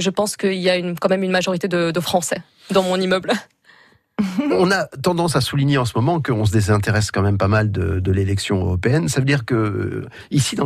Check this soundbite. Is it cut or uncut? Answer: uncut